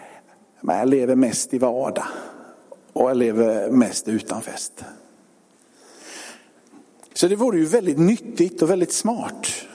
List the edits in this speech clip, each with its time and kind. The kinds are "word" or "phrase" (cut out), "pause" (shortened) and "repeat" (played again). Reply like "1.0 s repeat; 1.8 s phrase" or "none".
7.1 s pause